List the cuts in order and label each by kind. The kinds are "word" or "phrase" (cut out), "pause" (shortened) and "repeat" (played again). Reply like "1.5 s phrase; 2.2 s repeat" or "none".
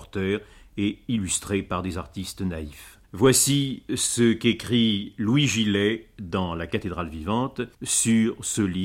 3.0 s pause; 7.7 s pause